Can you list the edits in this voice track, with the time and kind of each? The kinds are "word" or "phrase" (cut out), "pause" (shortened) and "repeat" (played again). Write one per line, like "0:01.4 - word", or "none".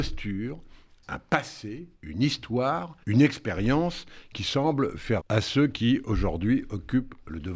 0:02.0 - pause
0:03.0 - pause
0:05.2 - word